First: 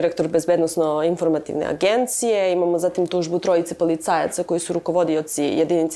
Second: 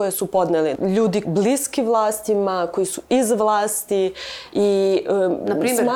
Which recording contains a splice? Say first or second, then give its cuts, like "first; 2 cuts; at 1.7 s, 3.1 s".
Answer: second; 1 cut; at 1.2 s